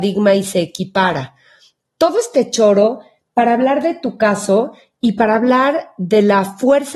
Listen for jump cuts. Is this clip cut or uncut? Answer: uncut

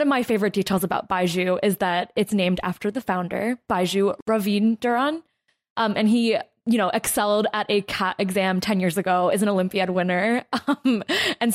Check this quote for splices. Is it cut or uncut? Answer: uncut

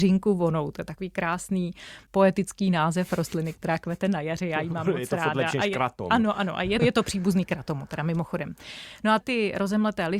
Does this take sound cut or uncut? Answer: cut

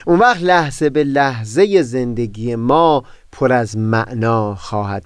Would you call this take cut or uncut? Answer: uncut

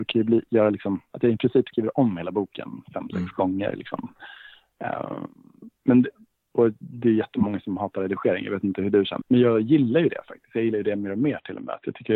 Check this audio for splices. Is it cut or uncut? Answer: cut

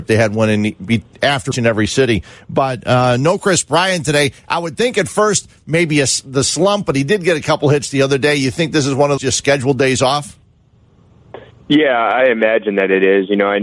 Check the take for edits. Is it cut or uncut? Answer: cut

